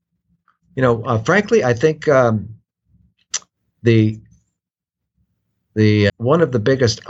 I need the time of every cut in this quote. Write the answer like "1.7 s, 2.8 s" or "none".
6.1 s

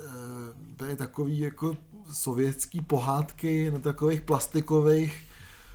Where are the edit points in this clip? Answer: 2.0 s

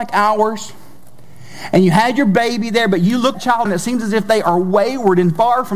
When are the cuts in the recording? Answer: 3.3 s, 3.7 s

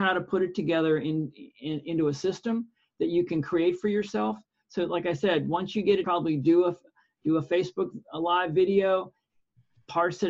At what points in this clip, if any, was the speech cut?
6.0 s

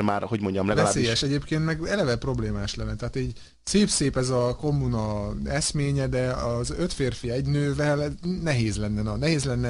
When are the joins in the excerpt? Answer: none

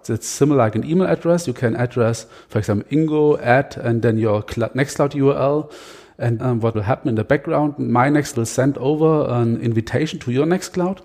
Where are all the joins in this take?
6.4 s, 6.7 s, 8.3 s

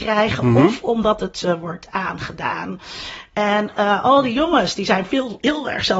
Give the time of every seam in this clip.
none

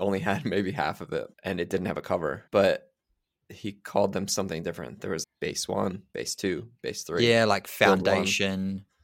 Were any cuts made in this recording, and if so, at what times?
1.3 s, 2.5 s, 5.2 s

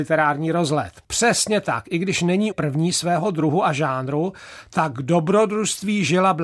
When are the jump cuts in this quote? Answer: 2.5 s

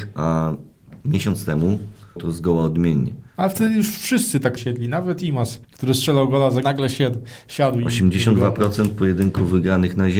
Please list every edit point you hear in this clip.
1.0 s, 2.2 s, 3.3 s, 4.6 s, 5.6 s, 6.6 s

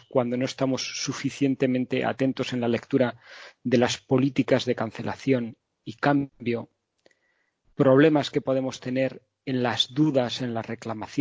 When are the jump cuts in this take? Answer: none

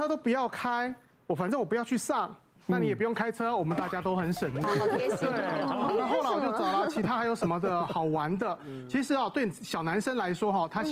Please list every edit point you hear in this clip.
none

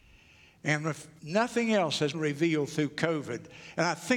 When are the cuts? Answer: 1.2 s, 2.1 s

